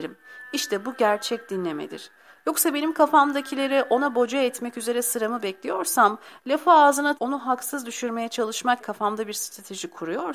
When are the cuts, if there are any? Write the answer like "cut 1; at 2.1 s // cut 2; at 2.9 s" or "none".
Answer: cut 1; at 7.2 s // cut 2; at 8.8 s